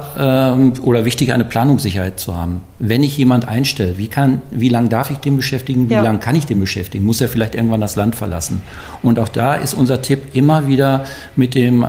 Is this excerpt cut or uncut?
uncut